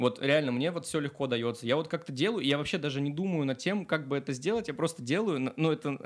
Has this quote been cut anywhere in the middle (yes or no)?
no